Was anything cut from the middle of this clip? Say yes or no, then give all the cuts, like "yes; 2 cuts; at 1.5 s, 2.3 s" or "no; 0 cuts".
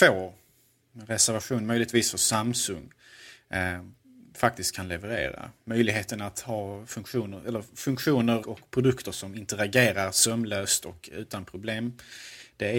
yes; 1 cut; at 8.4 s